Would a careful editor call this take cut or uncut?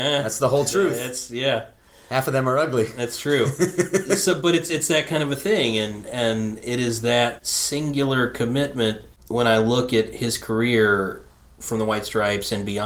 uncut